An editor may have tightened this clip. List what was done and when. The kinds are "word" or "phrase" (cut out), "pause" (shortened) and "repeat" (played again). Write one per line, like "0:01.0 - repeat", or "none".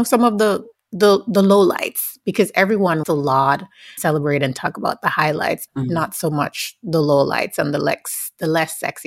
0:03.0 - word
0:04.0 - word
0:05.7 - word

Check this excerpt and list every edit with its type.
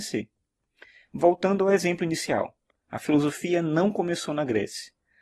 none

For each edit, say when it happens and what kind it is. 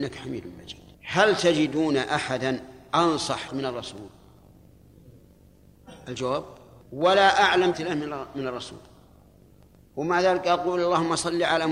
0:00.9 - pause
0:03.5 - word
0:06.8 - word
0:07.7 - word

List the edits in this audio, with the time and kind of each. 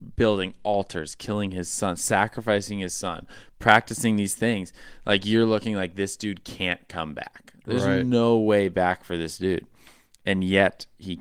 none

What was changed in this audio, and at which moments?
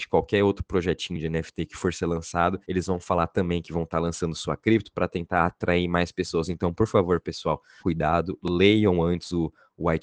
0:02.6 - pause
0:07.8 - word

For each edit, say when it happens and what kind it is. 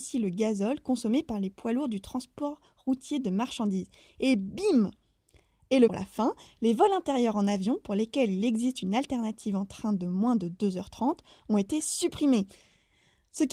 0:05.9 - phrase

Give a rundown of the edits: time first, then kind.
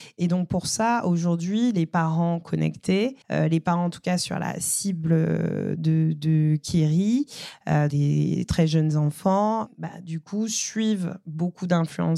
0:03.2 - pause
0:07.9 - word

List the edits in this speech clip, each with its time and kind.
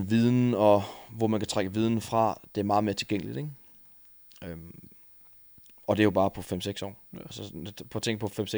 0:07.1 - pause

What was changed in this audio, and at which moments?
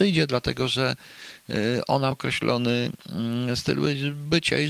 0:02.1 - word

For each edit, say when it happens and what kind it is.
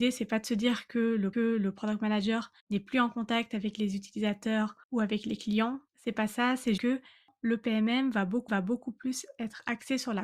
0:01.3 - repeat
0:02.6 - pause
0:04.8 - pause
0:05.9 - pause
0:06.8 - word
0:08.5 - repeat

